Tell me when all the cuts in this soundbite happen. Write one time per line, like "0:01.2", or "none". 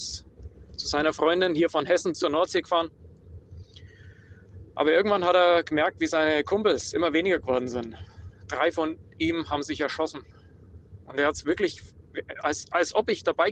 0:02.1